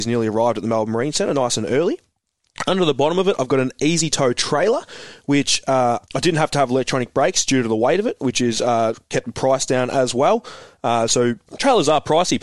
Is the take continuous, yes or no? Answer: no